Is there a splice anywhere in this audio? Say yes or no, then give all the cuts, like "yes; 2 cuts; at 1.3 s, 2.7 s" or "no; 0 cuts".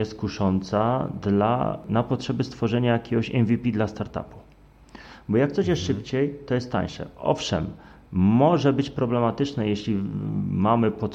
no; 0 cuts